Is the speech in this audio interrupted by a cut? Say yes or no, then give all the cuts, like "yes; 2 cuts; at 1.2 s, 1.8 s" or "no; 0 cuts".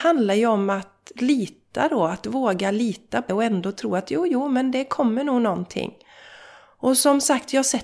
yes; 1 cut; at 3.3 s